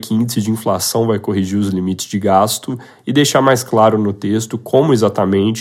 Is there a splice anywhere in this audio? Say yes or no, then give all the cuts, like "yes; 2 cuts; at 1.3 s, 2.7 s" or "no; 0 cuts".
no; 0 cuts